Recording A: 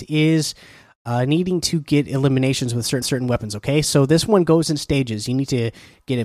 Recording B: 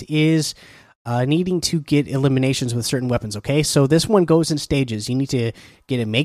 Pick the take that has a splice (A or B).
A